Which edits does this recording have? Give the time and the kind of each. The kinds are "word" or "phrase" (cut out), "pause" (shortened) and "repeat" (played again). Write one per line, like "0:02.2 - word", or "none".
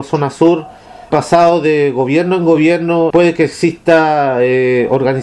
0:01.1 - word
0:03.1 - word